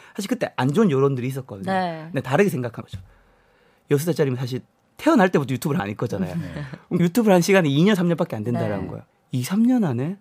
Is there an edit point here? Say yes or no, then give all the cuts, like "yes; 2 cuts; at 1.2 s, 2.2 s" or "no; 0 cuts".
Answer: yes; 5 cuts; at 2.8 s, 4.7 s, 5.8 s, 7.0 s, 9.1 s